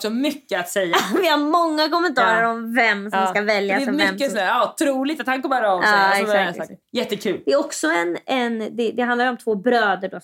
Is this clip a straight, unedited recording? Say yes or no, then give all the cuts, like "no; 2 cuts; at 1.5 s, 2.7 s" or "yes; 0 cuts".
yes; 0 cuts